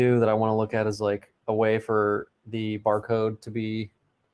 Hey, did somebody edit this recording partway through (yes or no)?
yes